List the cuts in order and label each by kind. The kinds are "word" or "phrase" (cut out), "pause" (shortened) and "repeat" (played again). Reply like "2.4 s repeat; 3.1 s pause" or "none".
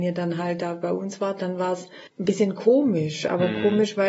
2.1 s pause